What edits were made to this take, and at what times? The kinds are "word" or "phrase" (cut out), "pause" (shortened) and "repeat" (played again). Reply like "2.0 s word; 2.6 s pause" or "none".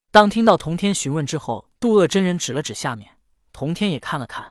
1.7 s pause